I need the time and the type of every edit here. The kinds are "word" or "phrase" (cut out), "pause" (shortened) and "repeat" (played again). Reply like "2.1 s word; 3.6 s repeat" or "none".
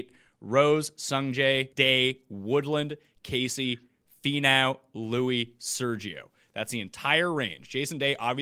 1.7 s word